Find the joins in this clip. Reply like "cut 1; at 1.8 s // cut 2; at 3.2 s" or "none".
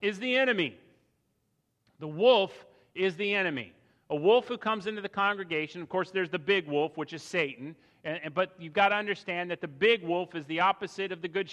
none